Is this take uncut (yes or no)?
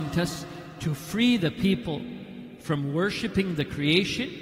yes